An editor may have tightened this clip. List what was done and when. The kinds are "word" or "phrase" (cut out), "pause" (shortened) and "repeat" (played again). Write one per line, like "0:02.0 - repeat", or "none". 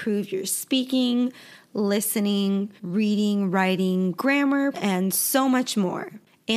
0:02.8 - pause
0:04.7 - word